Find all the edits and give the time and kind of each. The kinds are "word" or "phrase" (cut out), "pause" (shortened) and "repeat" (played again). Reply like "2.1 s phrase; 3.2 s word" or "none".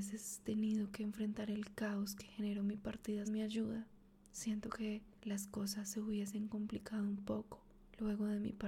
3.2 s word; 4.0 s pause; 5.1 s pause